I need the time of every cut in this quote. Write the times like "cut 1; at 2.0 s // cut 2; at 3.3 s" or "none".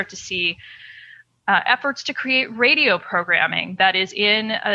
none

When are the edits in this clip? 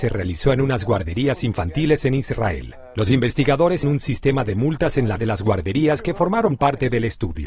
cut 1; at 3.8 s // cut 2; at 5.2 s

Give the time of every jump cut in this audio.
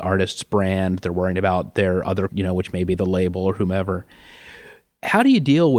cut 1; at 2.3 s

